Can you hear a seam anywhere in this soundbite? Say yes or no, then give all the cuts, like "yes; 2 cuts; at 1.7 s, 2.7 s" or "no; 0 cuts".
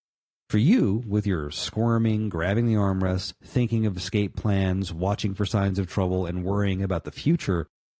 no; 0 cuts